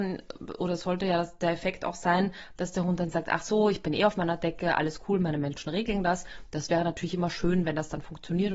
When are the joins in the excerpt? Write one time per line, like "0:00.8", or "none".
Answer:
none